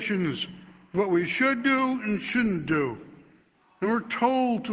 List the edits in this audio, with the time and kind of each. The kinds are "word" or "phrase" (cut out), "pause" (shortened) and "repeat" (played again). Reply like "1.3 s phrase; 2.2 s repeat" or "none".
none